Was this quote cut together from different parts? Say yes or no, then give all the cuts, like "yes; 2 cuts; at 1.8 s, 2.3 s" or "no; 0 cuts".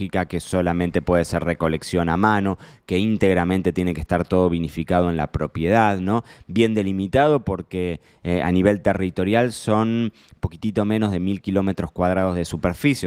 no; 0 cuts